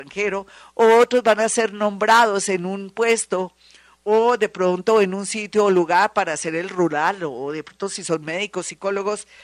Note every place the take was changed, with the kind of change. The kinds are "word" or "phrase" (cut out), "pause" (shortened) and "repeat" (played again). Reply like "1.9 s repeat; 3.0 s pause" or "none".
none